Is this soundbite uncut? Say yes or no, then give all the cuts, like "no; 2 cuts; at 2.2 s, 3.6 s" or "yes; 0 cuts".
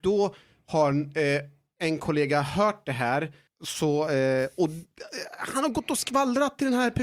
yes; 0 cuts